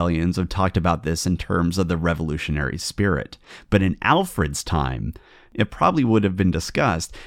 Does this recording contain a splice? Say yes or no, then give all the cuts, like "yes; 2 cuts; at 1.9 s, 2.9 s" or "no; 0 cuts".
no; 0 cuts